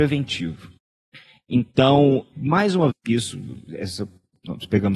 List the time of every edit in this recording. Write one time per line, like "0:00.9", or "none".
0:02.3
0:02.9